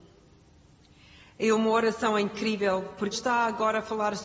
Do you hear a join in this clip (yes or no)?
yes